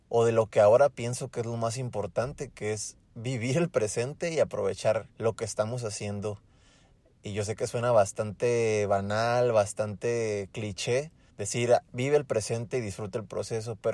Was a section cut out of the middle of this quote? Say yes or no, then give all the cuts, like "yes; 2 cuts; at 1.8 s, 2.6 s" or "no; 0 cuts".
yes; 3 cuts; at 3.0 s, 5.1 s, 11.3 s